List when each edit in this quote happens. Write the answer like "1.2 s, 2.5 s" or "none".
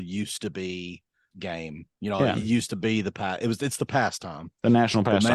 1.3 s

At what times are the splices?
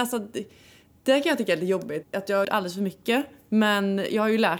2.0 s, 2.4 s

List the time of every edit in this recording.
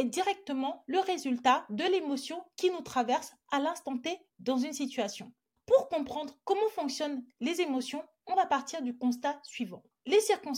5.6 s

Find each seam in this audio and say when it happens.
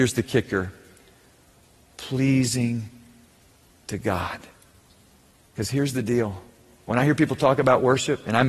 none

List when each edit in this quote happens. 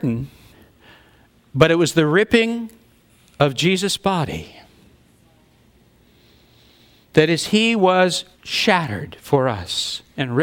8.3 s

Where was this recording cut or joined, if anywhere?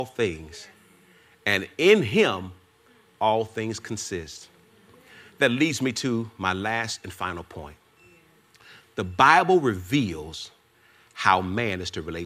none

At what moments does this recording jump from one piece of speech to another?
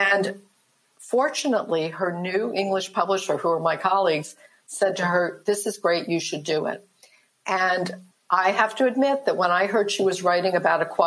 none

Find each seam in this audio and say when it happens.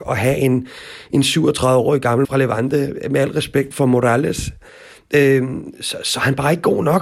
2.2 s, 3.7 s

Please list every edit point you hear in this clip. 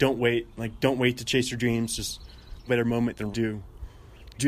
2.7 s, 3.3 s

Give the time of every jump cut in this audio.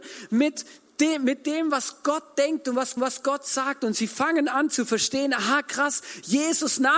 3.0 s

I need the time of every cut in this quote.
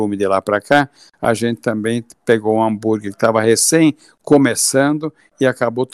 none

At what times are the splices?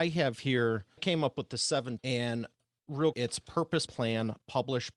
1.0 s, 2.0 s, 3.1 s, 3.9 s

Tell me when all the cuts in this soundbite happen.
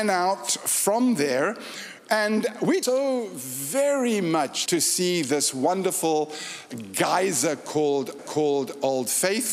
2.8 s, 4.7 s, 8.2 s

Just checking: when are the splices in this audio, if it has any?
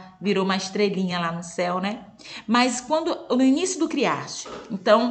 none

